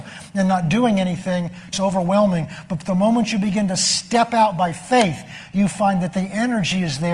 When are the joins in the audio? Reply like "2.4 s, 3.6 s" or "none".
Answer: 1.7 s